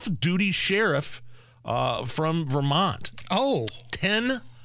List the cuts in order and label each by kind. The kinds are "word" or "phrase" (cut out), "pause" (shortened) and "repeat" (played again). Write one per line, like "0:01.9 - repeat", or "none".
none

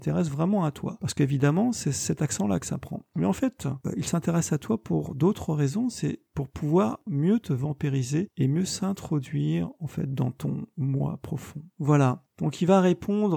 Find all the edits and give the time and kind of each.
0:06.3 - pause

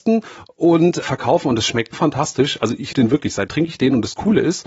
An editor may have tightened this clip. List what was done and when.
0:01.0 - word
0:01.9 - word
0:02.9 - word
0:03.5 - word

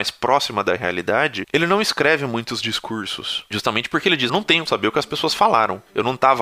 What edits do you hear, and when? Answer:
0:04.3 - word
0:04.7 - word

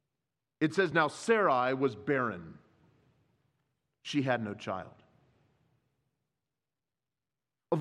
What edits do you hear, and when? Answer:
none

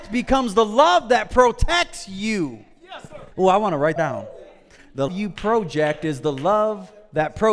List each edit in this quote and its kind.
0:03.3 - pause
0:04.0 - phrase
0:05.1 - word

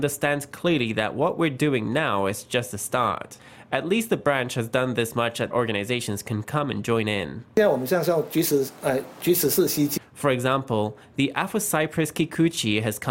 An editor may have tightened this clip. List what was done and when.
0:05.5 - phrase

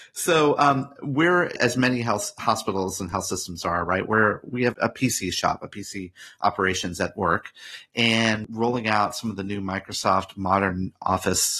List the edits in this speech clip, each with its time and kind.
0:04.7 - word
0:08.5 - word

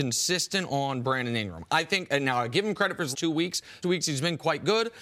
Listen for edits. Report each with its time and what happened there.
0:03.1 - word
0:03.8 - word

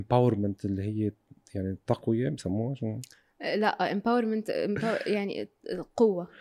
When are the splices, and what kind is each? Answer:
none

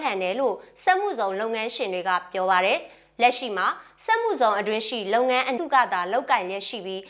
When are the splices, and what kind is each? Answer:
0:05.6 - word

